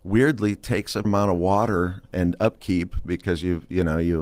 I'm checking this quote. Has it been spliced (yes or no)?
yes